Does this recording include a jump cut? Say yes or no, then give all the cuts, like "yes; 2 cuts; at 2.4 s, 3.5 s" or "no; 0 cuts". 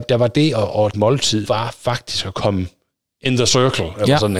yes; 2 cuts; at 0.9 s, 1.5 s